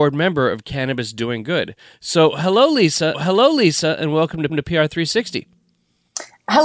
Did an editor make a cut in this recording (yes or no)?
yes